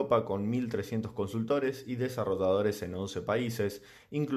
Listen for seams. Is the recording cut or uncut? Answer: uncut